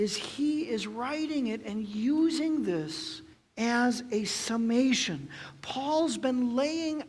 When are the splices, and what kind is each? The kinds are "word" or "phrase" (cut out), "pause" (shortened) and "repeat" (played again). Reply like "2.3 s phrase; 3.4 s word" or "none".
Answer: 3.3 s pause